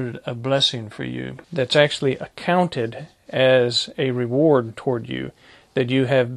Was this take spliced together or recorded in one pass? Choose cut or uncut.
cut